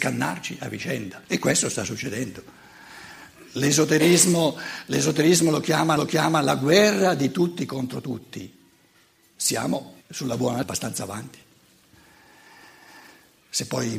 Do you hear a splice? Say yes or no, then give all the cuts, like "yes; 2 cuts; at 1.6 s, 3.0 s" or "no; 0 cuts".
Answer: yes; 4 cuts; at 1.2 s, 6.0 s, 10.0 s, 10.6 s